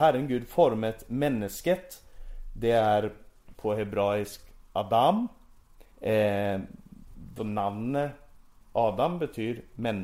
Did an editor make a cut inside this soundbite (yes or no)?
yes